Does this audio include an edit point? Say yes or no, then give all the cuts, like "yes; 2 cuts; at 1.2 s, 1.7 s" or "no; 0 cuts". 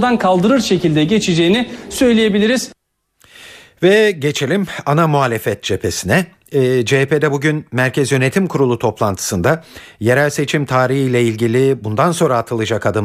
no; 0 cuts